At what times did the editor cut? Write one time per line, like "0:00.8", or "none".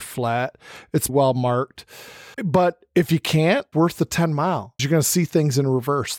0:01.1
0:02.3
0:03.7
0:04.8